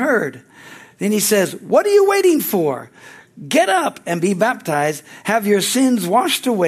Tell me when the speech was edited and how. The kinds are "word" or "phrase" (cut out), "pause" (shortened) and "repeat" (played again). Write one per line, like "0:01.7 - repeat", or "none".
none

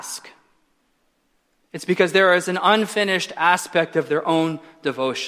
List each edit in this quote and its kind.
none

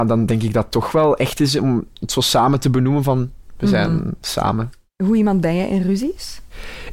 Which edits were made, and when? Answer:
none

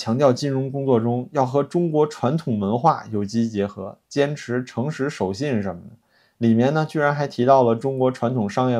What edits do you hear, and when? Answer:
none

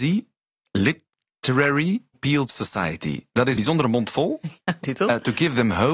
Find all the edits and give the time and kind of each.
0:02.1 - phrase
0:02.4 - word
0:03.6 - word
0:04.8 - word

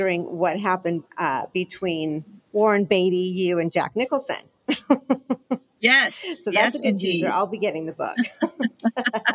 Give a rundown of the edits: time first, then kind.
none

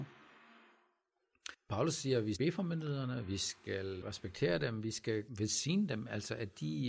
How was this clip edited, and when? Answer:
0:01.5 - pause
0:02.4 - word
0:04.0 - word
0:05.3 - pause

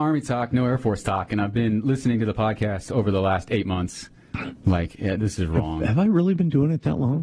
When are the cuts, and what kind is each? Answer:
none

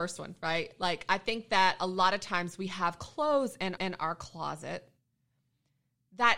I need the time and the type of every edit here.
0:03.8 - repeat

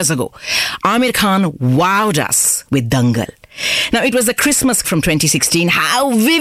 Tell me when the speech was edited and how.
0:04.8 - word

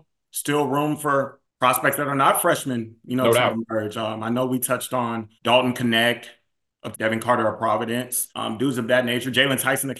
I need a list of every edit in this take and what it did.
0:01.5 - pause
0:05.4 - pause
0:06.9 - word
0:08.3 - pause

